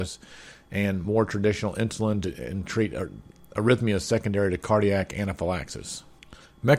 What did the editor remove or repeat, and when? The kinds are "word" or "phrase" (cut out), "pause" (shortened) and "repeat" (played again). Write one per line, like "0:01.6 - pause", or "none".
none

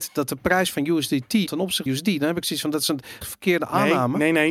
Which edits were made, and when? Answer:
0:01.5 - word
0:01.9 - word
0:03.2 - word

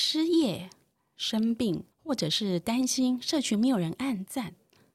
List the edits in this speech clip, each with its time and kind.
0:01.9 - pause

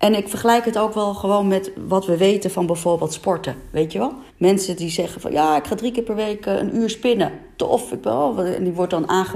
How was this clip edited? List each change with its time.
0:04.3 - pause

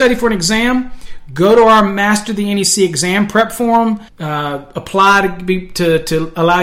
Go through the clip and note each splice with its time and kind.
0:04.1 - pause

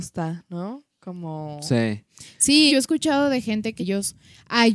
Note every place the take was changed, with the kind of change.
0:02.7 - word
0:03.8 - phrase

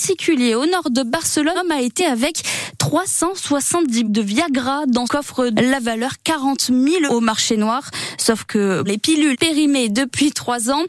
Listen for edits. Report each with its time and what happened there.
0:01.5 - word
0:02.0 - word
0:04.0 - word
0:05.0 - word
0:05.5 - word
0:07.1 - word
0:08.9 - word
0:09.3 - word

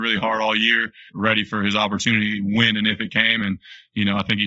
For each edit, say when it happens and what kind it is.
0:01.1 - word

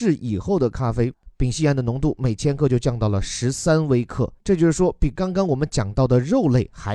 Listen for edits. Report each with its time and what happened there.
0:04.4 - pause

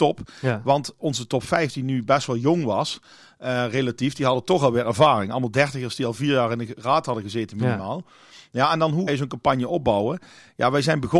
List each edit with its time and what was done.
0:01.0 - word
0:09.1 - word

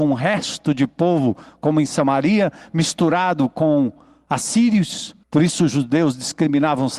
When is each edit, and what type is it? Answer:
0:05.2 - pause

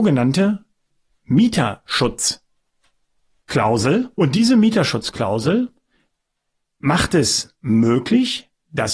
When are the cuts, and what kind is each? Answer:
0:04.1 - pause

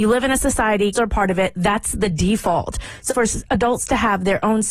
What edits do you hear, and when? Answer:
0:00.9 - word
0:03.1 - word

